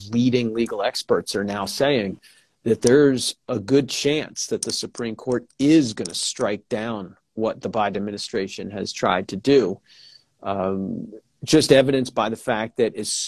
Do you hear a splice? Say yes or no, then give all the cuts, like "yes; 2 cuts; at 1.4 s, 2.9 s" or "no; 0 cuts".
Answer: no; 0 cuts